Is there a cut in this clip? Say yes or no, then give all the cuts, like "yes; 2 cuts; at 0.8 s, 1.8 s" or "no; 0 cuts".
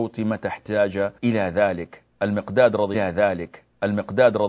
yes; 2 cuts; at 1.2 s, 2.9 s